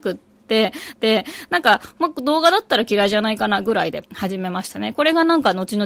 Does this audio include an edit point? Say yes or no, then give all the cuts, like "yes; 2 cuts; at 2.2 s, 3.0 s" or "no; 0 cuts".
yes; 1 cut; at 0.9 s